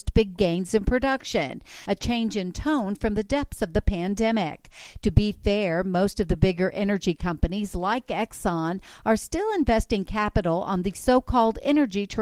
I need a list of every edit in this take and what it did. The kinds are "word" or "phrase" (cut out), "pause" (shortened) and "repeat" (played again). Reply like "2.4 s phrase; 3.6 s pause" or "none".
none